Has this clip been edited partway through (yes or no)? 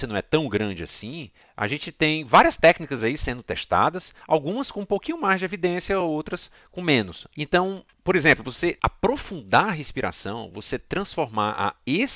no